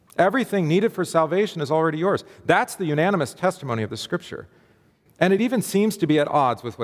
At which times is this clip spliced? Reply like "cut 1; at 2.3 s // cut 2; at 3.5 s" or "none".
none